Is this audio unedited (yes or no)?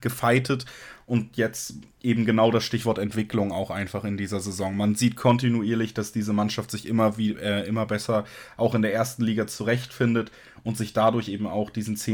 yes